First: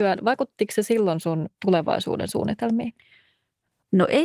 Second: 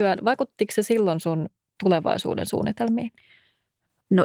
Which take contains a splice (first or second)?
first